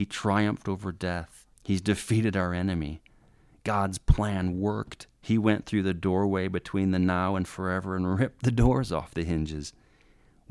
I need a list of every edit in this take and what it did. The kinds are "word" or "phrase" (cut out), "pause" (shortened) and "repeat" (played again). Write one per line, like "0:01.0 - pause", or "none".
0:01.5 - pause
0:05.1 - pause